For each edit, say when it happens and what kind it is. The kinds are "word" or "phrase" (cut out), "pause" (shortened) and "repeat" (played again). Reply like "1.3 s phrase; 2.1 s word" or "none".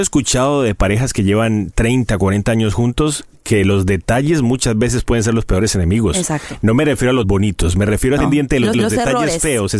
7.2 s word; 8.2 s phrase; 8.7 s repeat